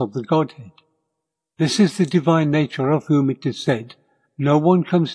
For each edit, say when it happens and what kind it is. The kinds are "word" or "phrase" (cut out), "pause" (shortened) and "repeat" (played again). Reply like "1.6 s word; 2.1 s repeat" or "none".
none